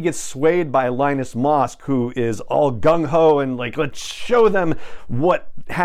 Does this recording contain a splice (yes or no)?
no